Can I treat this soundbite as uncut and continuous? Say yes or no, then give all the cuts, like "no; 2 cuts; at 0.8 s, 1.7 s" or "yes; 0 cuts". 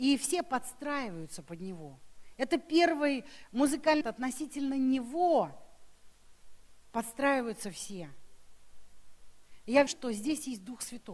no; 2 cuts; at 4.0 s, 9.9 s